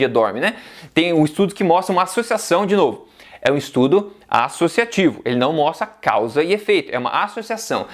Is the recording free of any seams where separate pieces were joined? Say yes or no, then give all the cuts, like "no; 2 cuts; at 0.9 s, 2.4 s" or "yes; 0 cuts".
yes; 0 cuts